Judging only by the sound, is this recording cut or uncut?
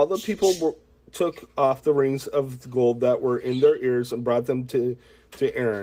uncut